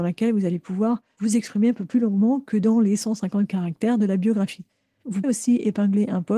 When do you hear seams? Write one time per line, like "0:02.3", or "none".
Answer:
0:05.2